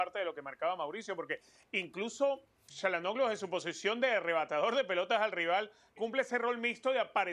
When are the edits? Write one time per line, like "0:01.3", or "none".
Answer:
0:02.7
0:06.0